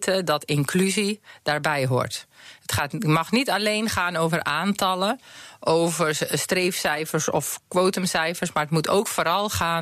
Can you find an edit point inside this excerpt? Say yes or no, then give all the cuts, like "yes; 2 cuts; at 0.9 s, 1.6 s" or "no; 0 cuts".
no; 0 cuts